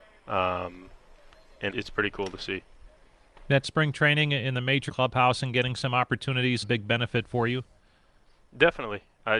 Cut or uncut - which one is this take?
cut